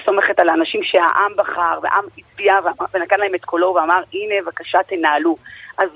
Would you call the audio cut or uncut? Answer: uncut